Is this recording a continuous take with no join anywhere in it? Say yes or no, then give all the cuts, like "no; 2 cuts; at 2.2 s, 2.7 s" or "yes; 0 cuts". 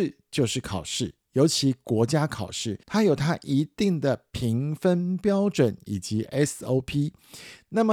no; 1 cut; at 2.8 s